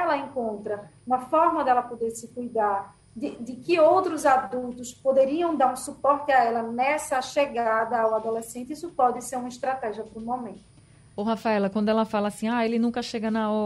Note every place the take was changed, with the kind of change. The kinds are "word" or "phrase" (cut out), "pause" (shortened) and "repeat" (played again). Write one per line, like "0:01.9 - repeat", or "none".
none

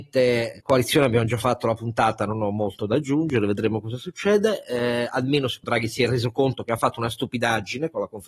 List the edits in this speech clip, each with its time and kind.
0:05.6 - word

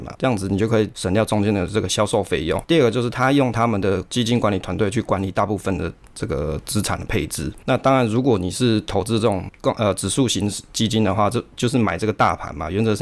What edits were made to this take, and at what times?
none

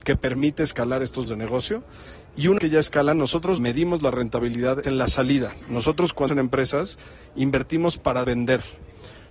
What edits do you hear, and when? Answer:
0:01.3 - word
0:02.6 - word
0:03.6 - word
0:04.8 - word
0:06.3 - word
0:08.2 - word

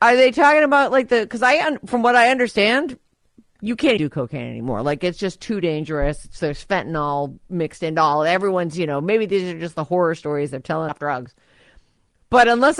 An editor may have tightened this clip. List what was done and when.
0:04.0 - word
0:10.9 - phrase

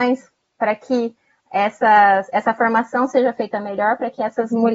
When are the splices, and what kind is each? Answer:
none

